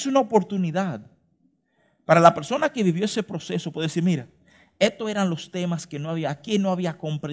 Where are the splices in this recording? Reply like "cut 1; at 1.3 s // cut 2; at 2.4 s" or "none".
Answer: none